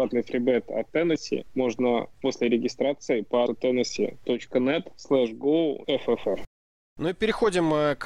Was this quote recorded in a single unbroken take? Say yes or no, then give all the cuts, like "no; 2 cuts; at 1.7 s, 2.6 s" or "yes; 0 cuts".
no; 3 cuts; at 2.1 s, 3.5 s, 5.8 s